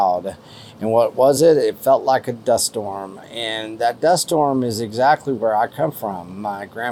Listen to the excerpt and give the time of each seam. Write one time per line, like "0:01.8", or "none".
none